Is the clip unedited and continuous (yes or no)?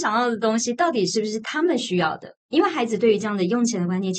no